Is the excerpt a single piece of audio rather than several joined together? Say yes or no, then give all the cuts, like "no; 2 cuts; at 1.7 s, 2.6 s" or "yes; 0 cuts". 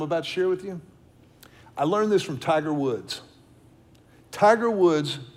yes; 0 cuts